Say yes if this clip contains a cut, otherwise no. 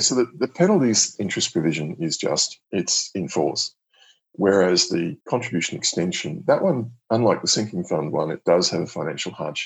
yes